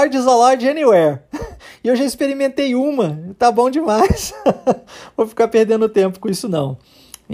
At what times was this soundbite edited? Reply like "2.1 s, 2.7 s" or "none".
none

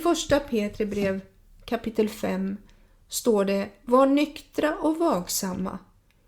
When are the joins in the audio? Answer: none

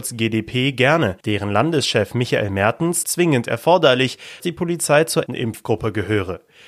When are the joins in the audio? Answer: 1.2 s, 3.0 s, 4.4 s, 5.3 s

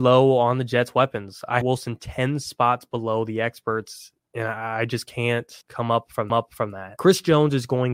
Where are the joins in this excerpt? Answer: 1.6 s, 5.6 s, 6.3 s

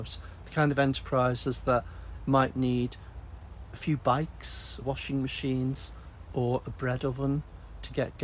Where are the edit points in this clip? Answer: 4.8 s

